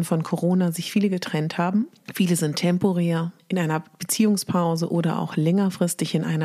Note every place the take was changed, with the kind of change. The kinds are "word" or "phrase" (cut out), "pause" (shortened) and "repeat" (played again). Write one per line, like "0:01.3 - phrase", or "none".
none